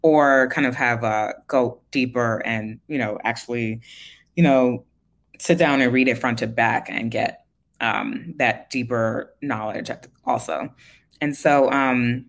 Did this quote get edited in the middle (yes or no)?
no